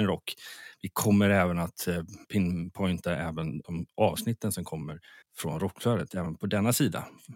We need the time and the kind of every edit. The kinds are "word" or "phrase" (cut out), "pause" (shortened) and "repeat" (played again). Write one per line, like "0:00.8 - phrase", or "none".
0:02.2 - pause
0:03.6 - pause
0:05.2 - pause